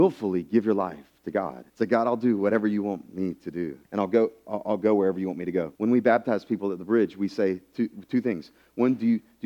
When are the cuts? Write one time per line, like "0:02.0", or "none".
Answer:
0:01.7
0:03.8
0:05.7